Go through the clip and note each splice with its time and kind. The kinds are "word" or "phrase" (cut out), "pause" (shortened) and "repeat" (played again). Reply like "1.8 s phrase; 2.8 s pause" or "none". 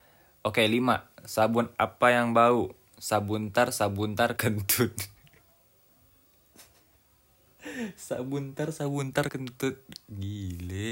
4.4 s word; 9.3 s word